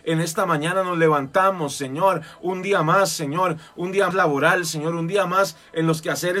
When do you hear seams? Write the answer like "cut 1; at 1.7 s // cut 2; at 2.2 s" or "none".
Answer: cut 1; at 4.1 s